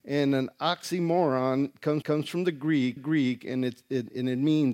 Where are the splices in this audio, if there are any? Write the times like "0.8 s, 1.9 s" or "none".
2.0 s, 3.0 s